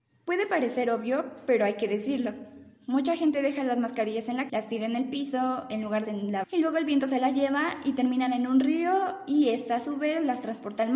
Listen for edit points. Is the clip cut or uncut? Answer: cut